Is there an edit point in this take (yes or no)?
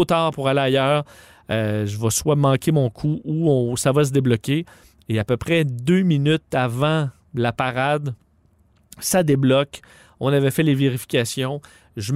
no